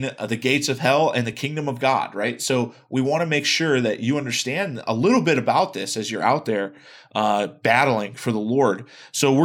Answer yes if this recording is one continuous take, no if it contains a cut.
yes